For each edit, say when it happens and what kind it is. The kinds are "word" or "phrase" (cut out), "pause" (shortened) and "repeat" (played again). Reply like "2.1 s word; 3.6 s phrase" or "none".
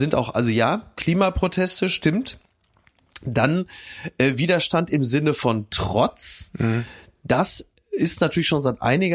none